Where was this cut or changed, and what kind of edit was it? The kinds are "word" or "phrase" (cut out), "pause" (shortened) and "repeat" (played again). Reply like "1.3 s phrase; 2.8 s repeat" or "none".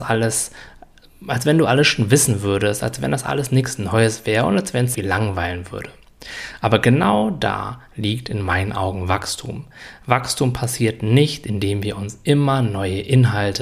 4.9 s phrase